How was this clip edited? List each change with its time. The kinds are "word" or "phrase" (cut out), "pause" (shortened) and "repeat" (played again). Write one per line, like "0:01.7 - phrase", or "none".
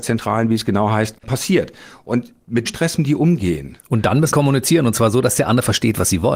0:02.7 - word
0:03.0 - word
0:04.3 - word